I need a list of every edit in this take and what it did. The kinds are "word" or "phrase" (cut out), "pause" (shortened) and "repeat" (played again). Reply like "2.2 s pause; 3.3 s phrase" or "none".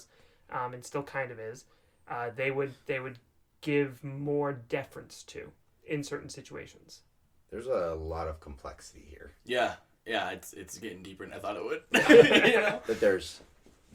none